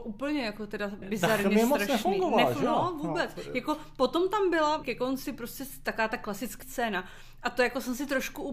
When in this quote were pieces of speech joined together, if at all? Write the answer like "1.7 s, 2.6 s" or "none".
1.0 s, 4.8 s, 6.6 s